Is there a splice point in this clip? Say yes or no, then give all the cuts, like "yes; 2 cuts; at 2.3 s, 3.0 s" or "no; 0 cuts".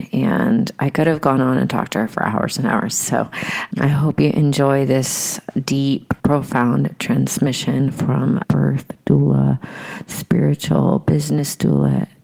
yes; 3 cuts; at 3.7 s, 6.2 s, 8.4 s